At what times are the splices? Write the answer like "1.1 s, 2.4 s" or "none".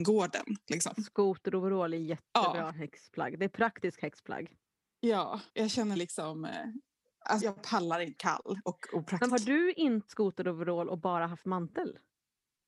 5.5 s, 6.0 s, 7.4 s, 8.2 s, 9.3 s, 10.1 s